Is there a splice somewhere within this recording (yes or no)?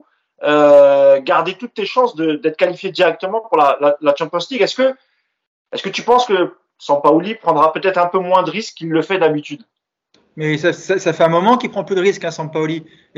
no